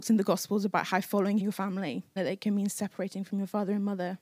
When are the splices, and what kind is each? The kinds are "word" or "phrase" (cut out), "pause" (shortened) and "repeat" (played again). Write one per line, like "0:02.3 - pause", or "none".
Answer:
0:01.4 - phrase
0:02.2 - word